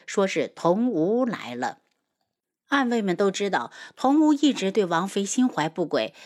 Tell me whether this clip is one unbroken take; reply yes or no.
yes